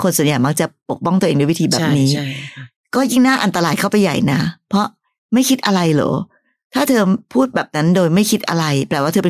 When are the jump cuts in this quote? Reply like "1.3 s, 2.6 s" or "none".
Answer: none